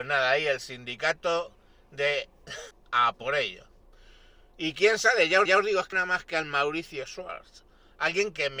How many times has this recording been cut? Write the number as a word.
three